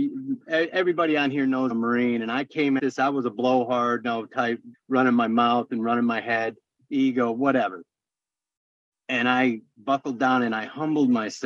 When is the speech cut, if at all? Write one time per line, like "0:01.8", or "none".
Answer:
0:01.7
0:02.8
0:04.0
0:04.7

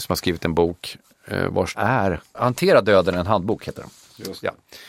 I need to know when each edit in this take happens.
0:01.7
0:02.3

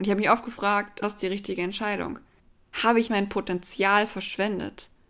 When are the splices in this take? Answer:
0:01.0
0:02.4
0:03.1

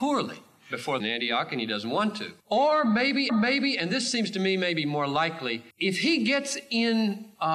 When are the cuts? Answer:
0:01.0
0:02.4
0:03.3
0:05.7

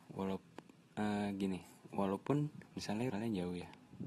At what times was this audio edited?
0:03.1

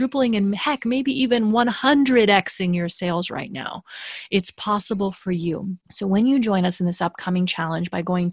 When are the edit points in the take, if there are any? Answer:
0:05.8

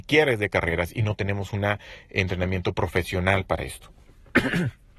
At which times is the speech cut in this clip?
none

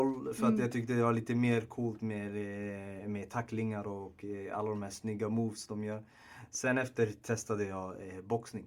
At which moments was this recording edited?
none

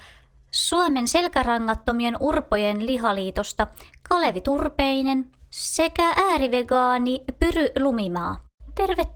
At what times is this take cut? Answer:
none

